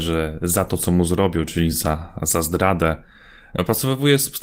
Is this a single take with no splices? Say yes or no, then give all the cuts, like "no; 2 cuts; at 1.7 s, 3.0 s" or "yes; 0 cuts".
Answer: yes; 0 cuts